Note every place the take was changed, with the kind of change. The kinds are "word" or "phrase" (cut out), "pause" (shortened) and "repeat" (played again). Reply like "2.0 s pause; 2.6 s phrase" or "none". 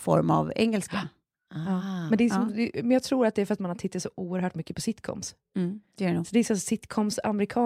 none